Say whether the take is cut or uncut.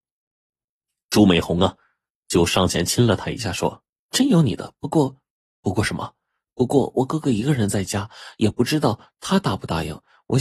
uncut